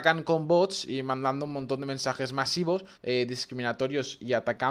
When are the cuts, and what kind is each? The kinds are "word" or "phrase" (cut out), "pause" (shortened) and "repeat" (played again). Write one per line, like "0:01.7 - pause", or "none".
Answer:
0:02.9 - pause